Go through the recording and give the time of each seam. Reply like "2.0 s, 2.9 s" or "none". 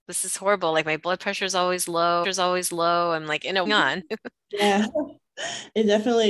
2.2 s, 3.7 s